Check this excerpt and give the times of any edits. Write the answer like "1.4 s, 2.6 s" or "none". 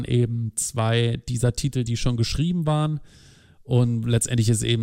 none